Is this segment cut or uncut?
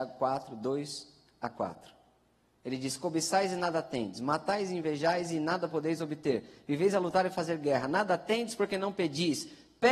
uncut